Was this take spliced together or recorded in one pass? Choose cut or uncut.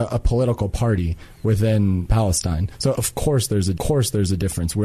cut